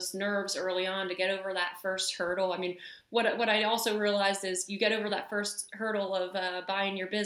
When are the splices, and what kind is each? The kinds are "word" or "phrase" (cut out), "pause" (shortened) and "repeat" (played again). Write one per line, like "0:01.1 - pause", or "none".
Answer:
none